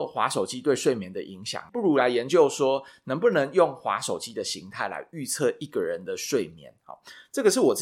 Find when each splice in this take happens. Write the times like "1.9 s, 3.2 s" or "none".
1.7 s

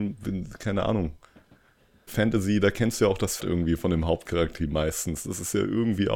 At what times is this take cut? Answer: 2.1 s, 3.4 s, 4.6 s

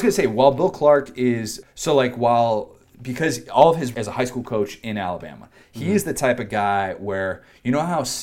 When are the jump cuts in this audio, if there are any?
1.6 s, 3.9 s

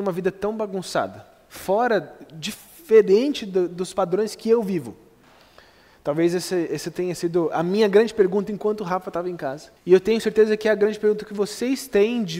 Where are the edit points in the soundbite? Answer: 9.8 s

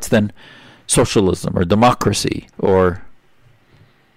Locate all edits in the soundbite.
2.5 s

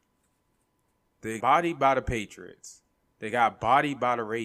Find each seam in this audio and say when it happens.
1.4 s

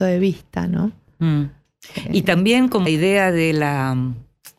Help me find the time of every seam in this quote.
2.9 s

